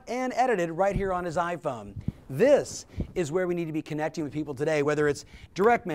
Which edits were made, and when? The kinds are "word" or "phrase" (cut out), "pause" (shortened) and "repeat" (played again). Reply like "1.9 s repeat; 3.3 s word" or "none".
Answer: none